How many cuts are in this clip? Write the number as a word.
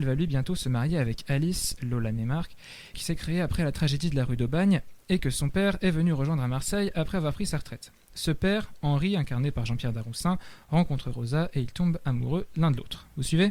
one